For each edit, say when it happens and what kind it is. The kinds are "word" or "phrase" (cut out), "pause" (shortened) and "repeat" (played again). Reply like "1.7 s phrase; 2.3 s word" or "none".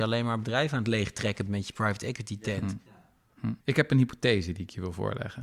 1.5 s word; 3.6 s pause